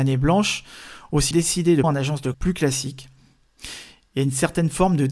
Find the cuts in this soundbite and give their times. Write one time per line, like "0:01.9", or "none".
0:01.3
0:01.8
0:02.3